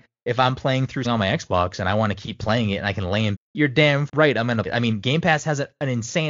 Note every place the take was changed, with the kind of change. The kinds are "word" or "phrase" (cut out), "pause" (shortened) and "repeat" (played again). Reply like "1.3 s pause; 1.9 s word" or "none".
1.0 s word; 3.3 s phrase; 4.1 s word; 4.7 s word